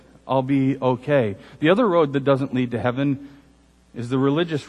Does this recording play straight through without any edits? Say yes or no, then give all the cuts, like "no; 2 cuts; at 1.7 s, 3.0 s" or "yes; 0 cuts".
yes; 0 cuts